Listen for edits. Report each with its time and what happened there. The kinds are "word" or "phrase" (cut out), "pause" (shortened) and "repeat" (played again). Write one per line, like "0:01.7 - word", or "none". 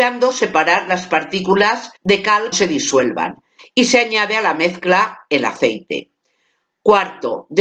0:02.0 - pause
0:02.5 - phrase